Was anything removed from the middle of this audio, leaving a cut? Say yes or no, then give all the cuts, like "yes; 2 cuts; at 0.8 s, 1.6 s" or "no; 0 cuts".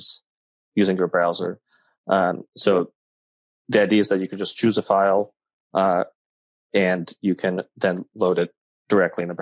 no; 0 cuts